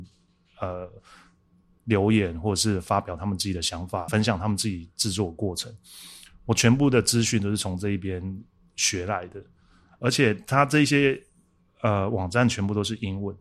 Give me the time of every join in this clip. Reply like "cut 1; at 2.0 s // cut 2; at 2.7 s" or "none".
cut 1; at 4.1 s